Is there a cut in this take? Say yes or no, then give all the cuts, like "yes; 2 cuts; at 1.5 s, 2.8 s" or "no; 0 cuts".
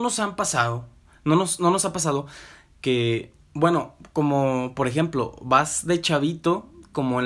no; 0 cuts